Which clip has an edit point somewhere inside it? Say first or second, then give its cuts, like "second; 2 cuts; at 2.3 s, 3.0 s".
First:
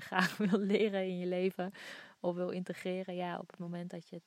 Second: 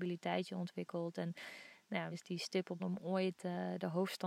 second; 2 cuts; at 2.1 s, 2.8 s